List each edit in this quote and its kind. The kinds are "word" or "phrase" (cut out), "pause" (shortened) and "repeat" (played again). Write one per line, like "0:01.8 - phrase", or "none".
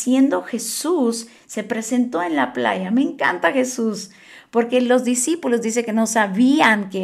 none